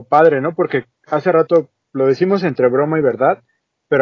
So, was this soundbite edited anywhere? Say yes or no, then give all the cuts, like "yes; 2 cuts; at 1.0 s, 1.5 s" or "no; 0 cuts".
no; 0 cuts